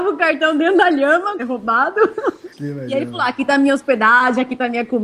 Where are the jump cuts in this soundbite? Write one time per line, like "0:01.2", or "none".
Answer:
0:01.4
0:02.5